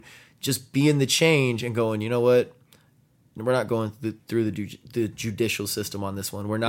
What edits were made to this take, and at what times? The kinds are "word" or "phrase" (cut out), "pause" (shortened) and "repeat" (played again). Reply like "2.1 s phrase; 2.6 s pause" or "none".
none